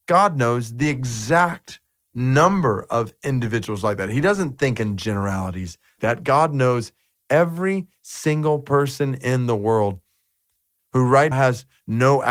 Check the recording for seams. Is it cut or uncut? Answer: cut